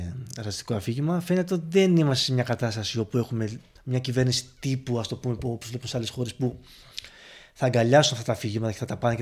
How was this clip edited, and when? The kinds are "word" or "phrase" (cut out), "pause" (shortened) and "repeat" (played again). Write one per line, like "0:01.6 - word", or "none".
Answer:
0:03.8 - pause

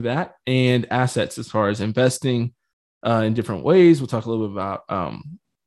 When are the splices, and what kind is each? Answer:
none

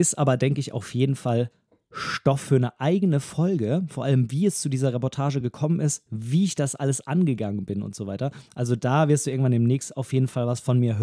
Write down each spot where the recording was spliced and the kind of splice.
none

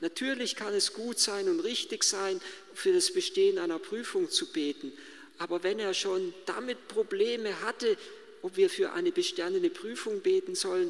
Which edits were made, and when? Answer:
none

